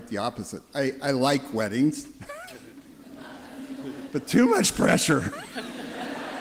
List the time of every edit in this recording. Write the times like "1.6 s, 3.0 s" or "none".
none